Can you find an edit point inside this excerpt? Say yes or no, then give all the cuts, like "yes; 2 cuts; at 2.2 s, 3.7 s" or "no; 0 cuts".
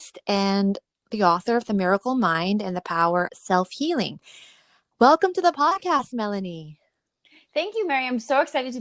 yes; 1 cut; at 3.3 s